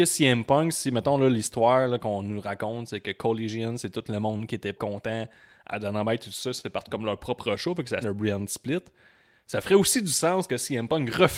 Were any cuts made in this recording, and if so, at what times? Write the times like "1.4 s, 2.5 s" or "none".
4.8 s, 8.0 s